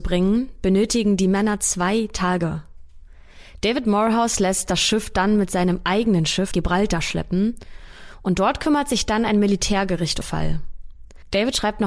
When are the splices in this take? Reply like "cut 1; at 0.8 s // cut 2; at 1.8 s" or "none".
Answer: cut 1; at 6.5 s // cut 2; at 10.2 s